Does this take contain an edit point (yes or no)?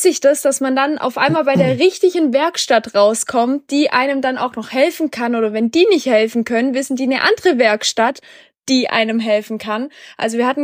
no